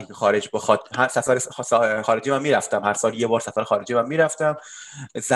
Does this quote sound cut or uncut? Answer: uncut